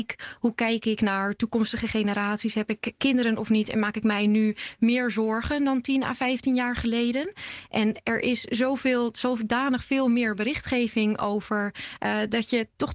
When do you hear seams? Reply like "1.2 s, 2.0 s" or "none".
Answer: none